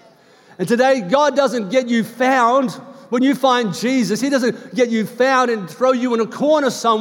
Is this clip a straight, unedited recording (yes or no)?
yes